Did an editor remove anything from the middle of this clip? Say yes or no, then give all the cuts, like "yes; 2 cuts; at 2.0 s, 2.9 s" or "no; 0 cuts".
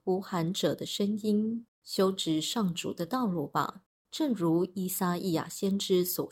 yes; 2 cuts; at 1.7 s, 4.0 s